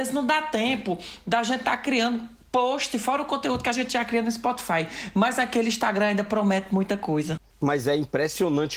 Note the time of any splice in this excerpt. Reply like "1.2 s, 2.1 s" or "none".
7.5 s